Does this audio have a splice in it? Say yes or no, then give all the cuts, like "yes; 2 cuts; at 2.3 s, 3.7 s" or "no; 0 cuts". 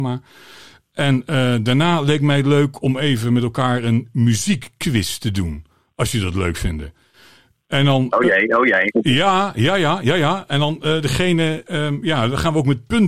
no; 0 cuts